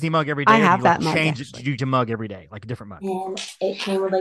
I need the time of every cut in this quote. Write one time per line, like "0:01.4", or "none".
0:01.8